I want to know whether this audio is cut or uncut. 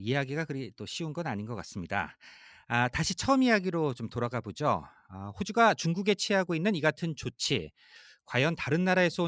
uncut